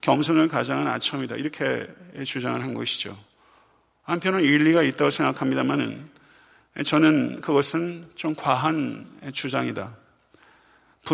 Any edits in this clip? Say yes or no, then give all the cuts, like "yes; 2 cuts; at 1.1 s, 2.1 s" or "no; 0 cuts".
no; 0 cuts